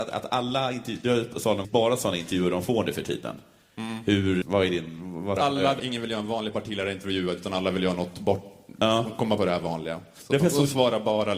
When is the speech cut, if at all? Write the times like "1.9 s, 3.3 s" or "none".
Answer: 1.6 s, 4.4 s, 5.4 s, 5.8 s, 9.4 s